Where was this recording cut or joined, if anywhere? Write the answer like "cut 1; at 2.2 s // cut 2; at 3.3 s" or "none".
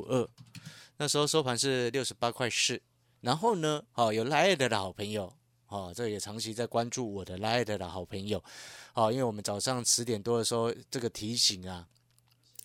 cut 1; at 3.9 s